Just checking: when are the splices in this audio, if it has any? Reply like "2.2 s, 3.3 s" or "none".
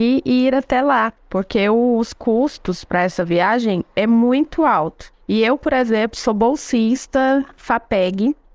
1.2 s